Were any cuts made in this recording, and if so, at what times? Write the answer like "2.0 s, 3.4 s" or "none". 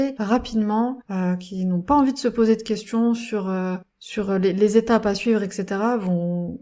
none